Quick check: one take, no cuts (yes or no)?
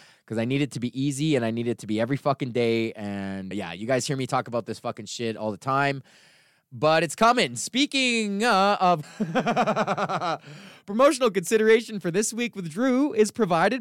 no